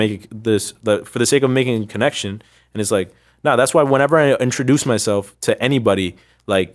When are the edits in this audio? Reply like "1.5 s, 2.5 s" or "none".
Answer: none